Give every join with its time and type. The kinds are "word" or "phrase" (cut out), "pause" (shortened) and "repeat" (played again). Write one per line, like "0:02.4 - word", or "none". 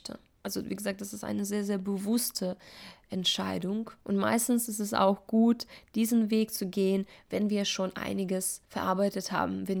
0:04.0 - pause
0:08.6 - pause